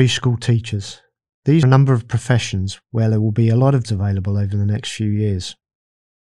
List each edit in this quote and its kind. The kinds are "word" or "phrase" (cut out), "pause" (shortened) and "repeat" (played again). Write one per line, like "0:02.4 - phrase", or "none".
0:01.6 - word
0:03.8 - word